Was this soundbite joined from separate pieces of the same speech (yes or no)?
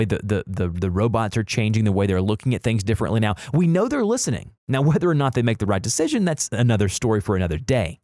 yes